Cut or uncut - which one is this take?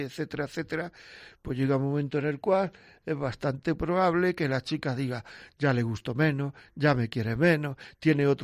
uncut